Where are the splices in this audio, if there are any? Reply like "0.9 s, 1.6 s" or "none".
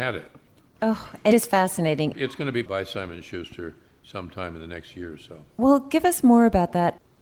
1.3 s, 2.6 s